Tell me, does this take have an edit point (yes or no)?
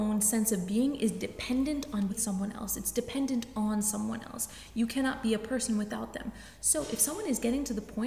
yes